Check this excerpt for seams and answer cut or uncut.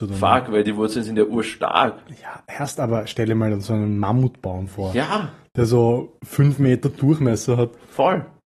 uncut